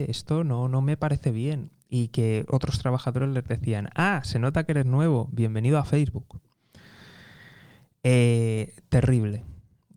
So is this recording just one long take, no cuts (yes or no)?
yes